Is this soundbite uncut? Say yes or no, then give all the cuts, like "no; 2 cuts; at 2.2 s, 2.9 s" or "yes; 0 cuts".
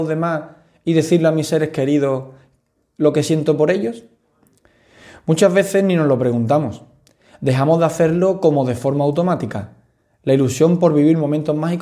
yes; 0 cuts